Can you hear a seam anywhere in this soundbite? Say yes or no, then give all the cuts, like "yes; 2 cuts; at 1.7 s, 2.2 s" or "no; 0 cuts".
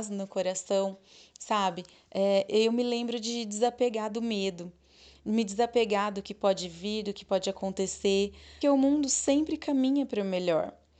yes; 1 cut; at 8.6 s